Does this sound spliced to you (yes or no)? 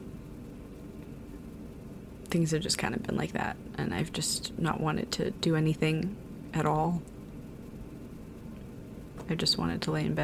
no